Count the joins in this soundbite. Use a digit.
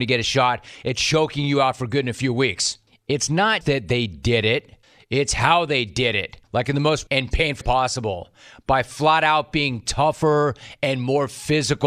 6